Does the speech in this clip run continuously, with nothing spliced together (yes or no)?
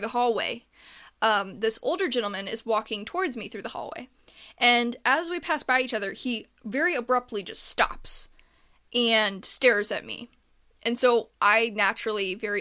yes